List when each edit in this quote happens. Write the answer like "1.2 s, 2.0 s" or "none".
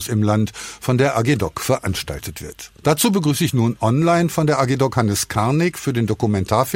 2.8 s

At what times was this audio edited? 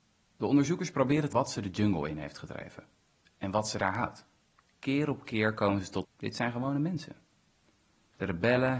1.3 s, 4.4 s, 6.0 s

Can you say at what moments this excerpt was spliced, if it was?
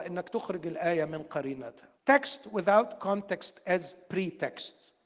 2.0 s

